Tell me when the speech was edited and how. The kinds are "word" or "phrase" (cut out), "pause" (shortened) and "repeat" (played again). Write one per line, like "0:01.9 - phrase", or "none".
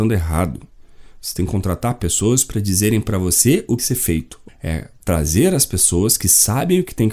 0:03.8 - phrase
0:04.5 - word